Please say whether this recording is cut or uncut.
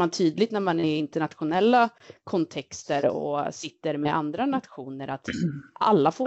uncut